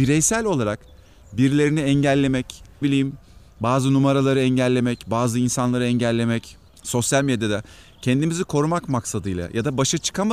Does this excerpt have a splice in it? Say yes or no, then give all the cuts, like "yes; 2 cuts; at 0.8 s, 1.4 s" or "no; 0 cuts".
yes; 2 cuts; at 2.8 s, 6.7 s